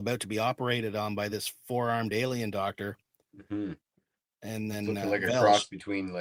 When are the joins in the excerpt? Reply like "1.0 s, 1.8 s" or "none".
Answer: none